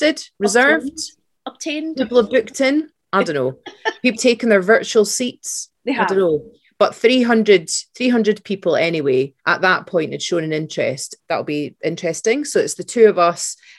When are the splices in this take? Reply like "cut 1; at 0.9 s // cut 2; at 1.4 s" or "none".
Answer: cut 1; at 4.2 s // cut 2; at 5.8 s // cut 3; at 9.4 s

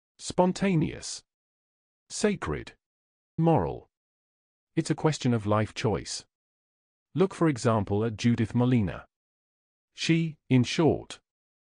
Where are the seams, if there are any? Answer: cut 1; at 3.4 s

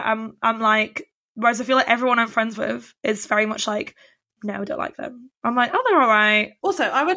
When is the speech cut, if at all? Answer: none

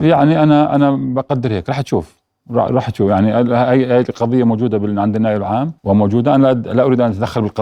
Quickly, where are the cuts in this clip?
cut 1; at 5.8 s

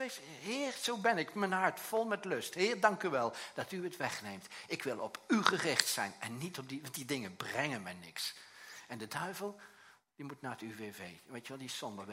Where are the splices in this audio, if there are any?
none

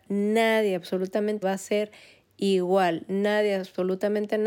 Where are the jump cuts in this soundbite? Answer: cut 1; at 1.4 s

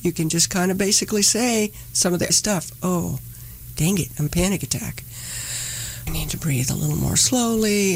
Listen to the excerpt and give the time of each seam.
cut 1; at 2.3 s // cut 2; at 4.3 s // cut 3; at 6.1 s

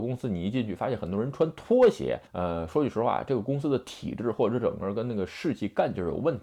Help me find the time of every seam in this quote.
cut 1; at 2.3 s

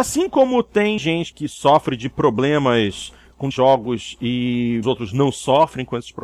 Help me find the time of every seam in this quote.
cut 1; at 1.0 s // cut 2; at 1.3 s // cut 3; at 3.5 s // cut 4; at 4.8 s

